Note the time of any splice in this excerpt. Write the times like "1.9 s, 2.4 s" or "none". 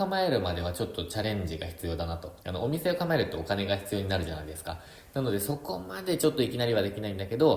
2.4 s